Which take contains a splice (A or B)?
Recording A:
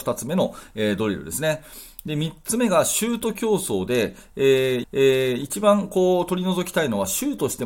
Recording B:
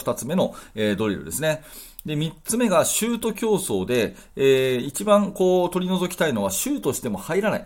A